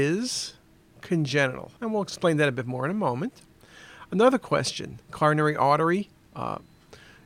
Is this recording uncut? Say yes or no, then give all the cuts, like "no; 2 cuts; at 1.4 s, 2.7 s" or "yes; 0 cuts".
no; 2 cuts; at 1.8 s, 5.0 s